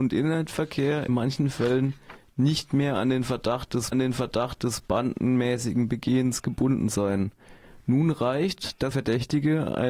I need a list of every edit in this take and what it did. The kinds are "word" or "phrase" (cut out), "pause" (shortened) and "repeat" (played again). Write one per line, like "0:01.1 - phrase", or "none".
0:01.1 - word
0:03.9 - repeat
0:08.9 - word